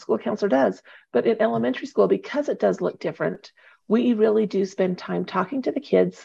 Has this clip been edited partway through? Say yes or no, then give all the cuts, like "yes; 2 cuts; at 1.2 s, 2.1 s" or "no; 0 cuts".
no; 0 cuts